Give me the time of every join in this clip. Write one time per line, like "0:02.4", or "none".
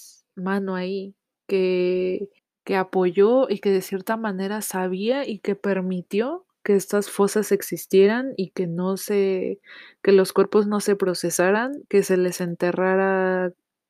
0:02.4